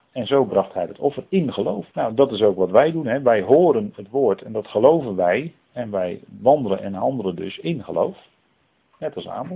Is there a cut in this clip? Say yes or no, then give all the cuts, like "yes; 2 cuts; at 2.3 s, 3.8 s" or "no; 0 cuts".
yes; 1 cut; at 1.9 s